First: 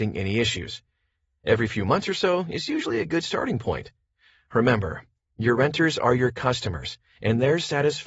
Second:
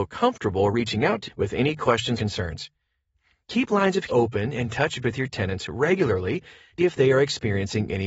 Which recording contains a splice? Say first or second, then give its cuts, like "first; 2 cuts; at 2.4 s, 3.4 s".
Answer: second; 5 cuts; at 1.2 s, 2.2 s, 4.1 s, 5.0 s, 6.8 s